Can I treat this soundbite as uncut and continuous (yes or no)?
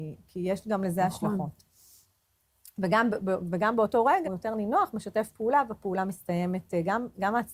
no